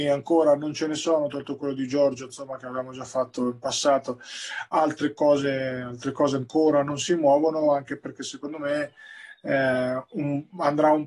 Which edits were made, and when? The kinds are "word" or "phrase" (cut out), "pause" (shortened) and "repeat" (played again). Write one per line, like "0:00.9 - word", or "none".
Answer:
none